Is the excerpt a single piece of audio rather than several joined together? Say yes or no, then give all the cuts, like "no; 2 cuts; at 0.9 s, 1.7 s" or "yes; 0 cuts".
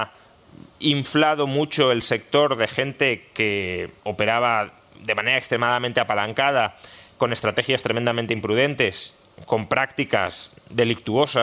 yes; 0 cuts